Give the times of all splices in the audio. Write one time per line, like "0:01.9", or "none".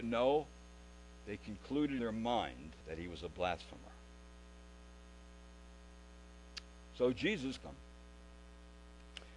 0:02.0
0:02.8
0:07.6

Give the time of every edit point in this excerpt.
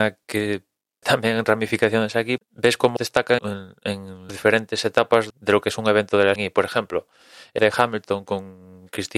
0:01.0
0:02.4
0:03.0
0:03.4
0:04.3
0:05.3
0:06.4
0:07.6

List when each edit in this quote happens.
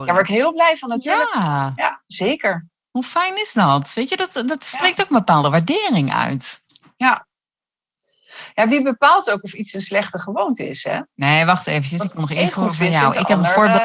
none

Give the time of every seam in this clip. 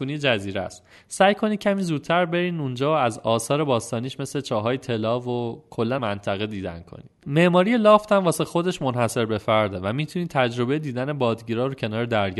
0:06.0

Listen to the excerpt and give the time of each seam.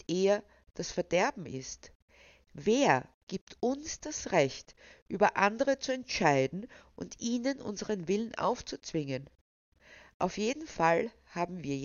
none

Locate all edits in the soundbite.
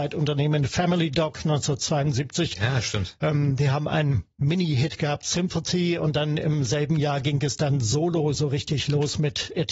none

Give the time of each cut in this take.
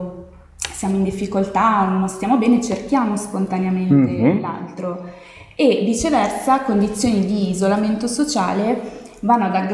none

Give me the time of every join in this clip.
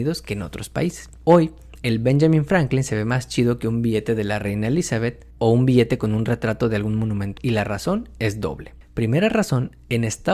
0:07.4

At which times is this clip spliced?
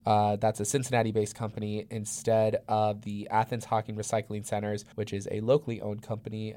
0:04.9

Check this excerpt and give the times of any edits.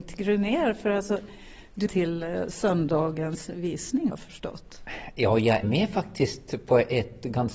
0:01.9
0:04.1
0:05.6

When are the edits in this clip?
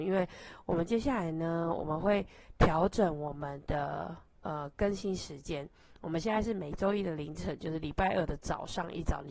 0:04.3

